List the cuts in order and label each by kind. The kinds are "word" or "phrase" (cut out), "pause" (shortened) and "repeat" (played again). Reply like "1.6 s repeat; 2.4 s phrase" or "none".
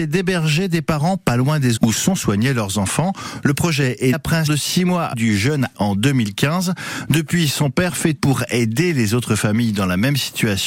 1.8 s word; 4.1 s word; 4.5 s word; 5.1 s word; 5.7 s word; 8.2 s word